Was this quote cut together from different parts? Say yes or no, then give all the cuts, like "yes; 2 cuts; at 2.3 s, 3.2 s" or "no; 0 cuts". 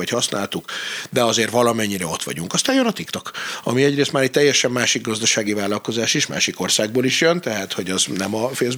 no; 0 cuts